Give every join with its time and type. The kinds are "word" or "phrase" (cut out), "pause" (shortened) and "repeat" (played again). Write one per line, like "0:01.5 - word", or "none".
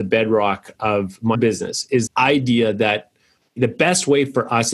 0:01.3 - word
0:02.1 - word